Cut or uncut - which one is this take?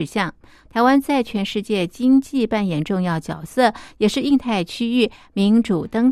uncut